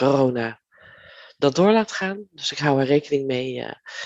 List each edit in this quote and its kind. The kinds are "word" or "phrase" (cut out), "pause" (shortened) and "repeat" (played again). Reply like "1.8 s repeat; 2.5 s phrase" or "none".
none